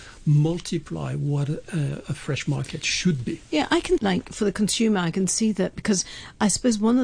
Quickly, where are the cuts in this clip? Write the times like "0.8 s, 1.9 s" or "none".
4.0 s